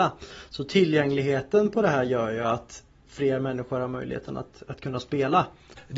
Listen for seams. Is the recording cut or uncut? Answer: uncut